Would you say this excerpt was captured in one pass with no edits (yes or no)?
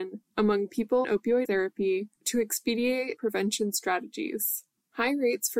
no